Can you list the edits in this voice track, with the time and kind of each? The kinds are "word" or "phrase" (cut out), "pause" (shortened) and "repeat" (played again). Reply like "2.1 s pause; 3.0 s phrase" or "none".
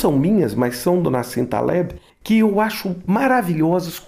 none